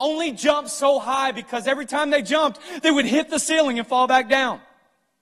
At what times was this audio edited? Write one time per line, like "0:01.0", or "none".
none